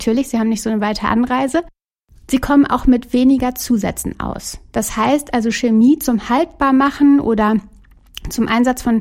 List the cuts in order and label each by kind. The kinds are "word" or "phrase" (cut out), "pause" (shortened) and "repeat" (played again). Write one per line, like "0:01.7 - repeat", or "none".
none